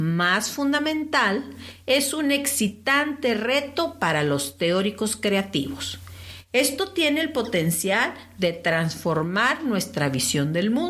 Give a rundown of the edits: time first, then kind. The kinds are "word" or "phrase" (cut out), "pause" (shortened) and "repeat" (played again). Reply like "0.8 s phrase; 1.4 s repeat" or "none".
none